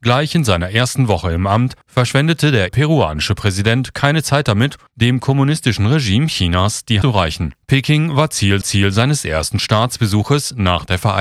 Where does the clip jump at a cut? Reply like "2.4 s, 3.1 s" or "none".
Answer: 1.8 s, 2.7 s, 4.9 s, 7.0 s, 7.6 s, 8.6 s